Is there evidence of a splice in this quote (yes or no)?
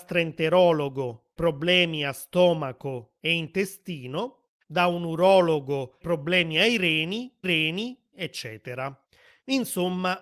yes